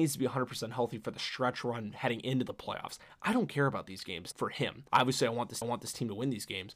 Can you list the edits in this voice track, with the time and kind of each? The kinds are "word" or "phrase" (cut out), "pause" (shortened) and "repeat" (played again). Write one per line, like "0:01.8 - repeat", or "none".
0:04.3 - word
0:04.9 - pause
0:05.6 - repeat